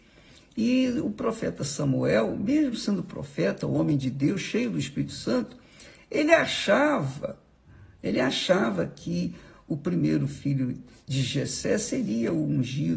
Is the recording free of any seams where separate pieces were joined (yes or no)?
yes